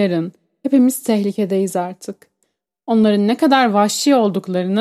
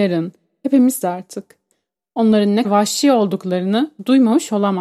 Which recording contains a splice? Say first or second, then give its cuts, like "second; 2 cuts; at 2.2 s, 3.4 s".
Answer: second; 2 cuts; at 1.0 s, 2.6 s